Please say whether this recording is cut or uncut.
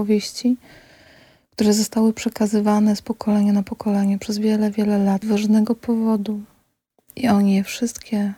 cut